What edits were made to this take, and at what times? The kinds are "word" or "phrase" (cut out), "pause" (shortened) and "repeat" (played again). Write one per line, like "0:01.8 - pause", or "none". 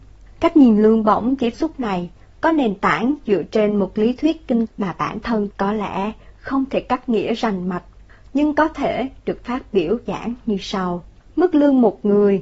0:01.5 - phrase
0:04.7 - word
0:05.5 - word
0:10.1 - word

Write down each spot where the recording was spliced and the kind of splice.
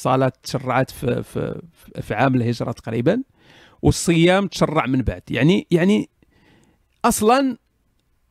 none

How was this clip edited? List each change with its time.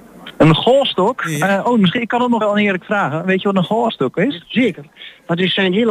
0:02.4 - word

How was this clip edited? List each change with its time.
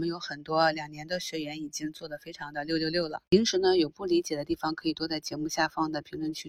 0:03.3 - pause

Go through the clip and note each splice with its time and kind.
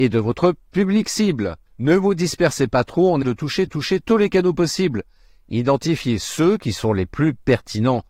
0:01.7 - pause
0:03.2 - word
0:03.7 - repeat

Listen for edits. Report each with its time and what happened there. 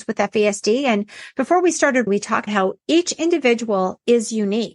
0:02.1 - word
0:02.5 - word
0:02.8 - pause

